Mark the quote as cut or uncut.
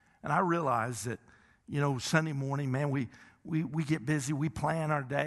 uncut